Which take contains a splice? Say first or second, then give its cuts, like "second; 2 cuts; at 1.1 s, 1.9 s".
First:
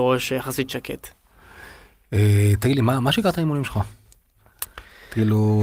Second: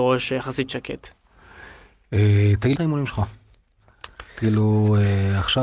second; 2 cuts; at 2.8 s, 4.3 s